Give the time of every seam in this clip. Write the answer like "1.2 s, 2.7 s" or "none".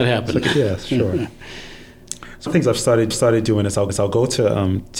2.5 s, 3.1 s, 3.9 s